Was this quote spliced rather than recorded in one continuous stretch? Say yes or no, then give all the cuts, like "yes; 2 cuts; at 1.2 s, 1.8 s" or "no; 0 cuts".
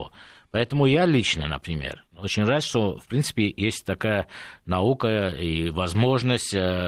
no; 0 cuts